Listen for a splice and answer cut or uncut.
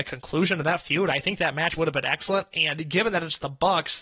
cut